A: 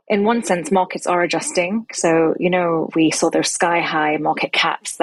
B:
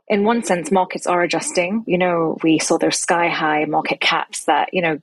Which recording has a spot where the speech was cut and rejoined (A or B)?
B